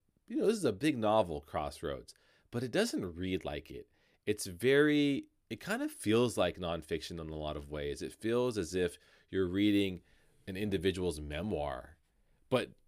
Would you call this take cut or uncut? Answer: uncut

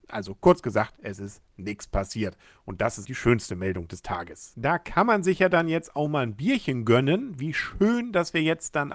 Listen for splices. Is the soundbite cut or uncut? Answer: cut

